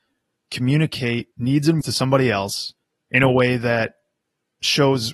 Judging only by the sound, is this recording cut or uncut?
cut